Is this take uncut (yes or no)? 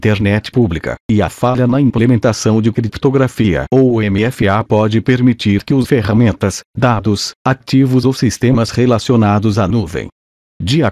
no